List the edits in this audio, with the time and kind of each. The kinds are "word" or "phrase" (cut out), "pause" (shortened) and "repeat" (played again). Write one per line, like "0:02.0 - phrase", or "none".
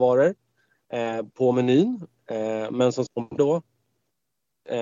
0:01.3 - pause
0:03.1 - word
0:03.4 - phrase